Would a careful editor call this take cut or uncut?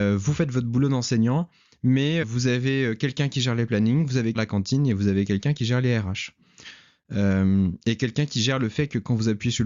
cut